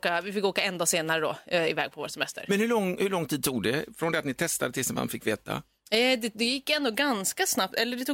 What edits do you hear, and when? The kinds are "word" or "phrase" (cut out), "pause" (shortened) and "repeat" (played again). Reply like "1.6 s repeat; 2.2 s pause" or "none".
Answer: none